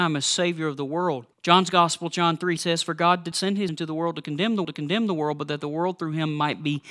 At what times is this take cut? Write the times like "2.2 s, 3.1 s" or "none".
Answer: 1.3 s, 2.6 s, 3.3 s, 3.7 s, 4.6 s